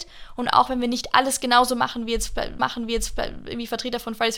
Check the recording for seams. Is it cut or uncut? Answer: cut